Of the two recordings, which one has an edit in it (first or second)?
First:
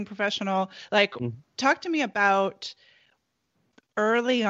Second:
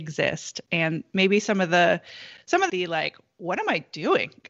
second